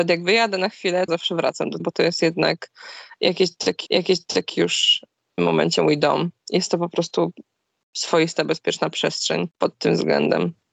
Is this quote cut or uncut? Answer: cut